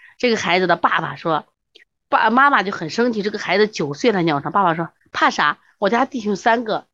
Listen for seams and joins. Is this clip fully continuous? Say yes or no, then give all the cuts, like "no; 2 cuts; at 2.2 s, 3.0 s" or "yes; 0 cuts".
yes; 0 cuts